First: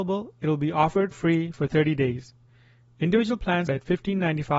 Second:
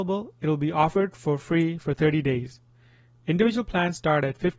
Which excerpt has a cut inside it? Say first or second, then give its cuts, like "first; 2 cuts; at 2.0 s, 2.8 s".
first; 2 cuts; at 1.1 s, 3.7 s